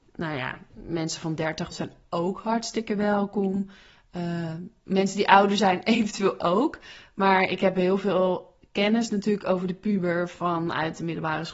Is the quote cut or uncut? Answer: cut